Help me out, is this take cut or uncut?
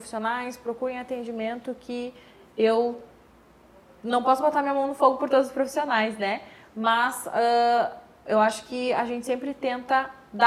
uncut